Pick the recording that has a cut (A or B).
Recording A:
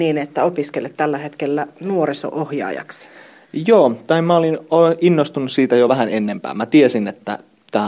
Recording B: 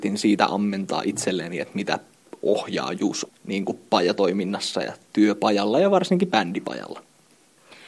B